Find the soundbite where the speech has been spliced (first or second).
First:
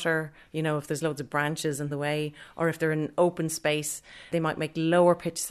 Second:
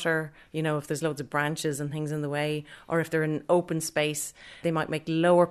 first